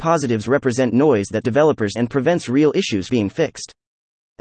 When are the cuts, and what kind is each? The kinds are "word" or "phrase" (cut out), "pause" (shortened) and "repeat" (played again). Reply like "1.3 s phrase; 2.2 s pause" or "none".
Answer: 1.4 s word; 2.0 s word; 3.1 s word

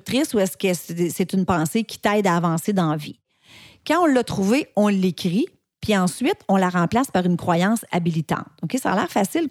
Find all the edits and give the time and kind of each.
none

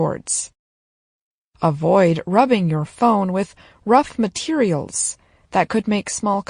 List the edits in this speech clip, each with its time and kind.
none

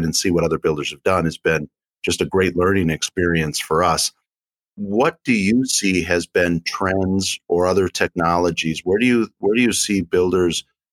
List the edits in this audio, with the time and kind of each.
none

